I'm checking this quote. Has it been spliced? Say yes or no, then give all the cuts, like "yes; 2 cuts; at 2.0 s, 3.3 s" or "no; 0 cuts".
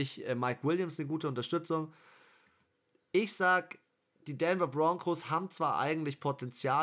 no; 0 cuts